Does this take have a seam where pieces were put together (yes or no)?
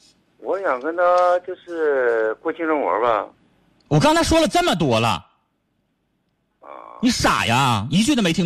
no